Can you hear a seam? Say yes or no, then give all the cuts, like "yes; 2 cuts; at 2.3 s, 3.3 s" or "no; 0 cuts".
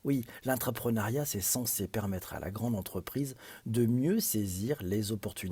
no; 0 cuts